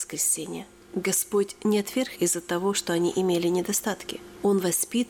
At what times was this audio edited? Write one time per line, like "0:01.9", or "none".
0:02.2